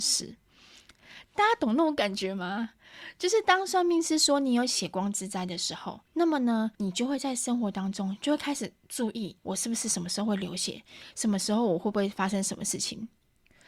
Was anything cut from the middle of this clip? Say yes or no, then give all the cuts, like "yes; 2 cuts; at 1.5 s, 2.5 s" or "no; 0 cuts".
yes; 3 cuts; at 6.1 s, 6.7 s, 9.4 s